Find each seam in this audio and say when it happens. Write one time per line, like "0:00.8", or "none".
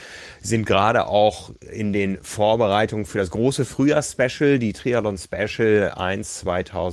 none

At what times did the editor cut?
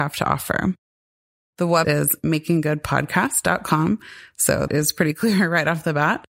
0:01.8
0:04.7

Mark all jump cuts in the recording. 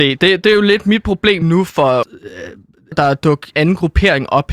0:01.4
0:02.0
0:02.9
0:03.5

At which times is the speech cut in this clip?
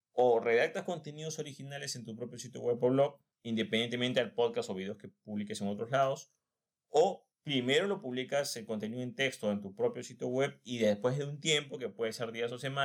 none

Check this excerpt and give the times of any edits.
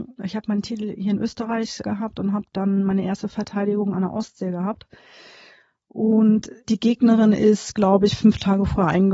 none

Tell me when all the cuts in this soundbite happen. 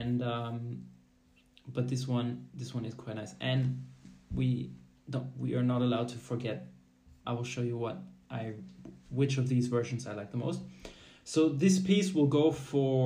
0:07.2

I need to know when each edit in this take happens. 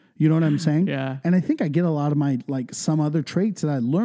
none

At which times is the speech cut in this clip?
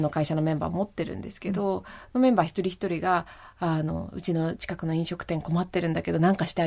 none

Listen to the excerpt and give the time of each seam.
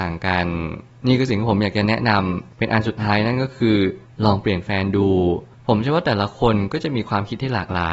none

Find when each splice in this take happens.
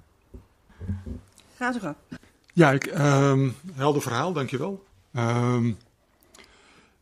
none

